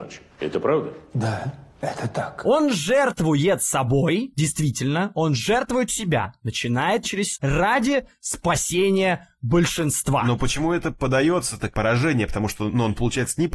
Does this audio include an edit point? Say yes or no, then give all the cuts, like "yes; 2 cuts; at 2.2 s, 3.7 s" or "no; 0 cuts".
yes; 4 cuts; at 5.9 s, 7.0 s, 7.3 s, 11.7 s